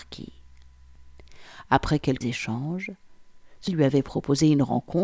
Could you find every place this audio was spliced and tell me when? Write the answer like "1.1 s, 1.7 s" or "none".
2.2 s, 3.7 s